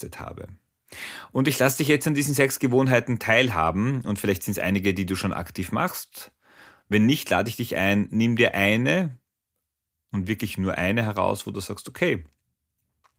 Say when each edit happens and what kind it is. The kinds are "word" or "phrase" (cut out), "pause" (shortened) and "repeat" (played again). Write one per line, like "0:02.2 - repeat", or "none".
none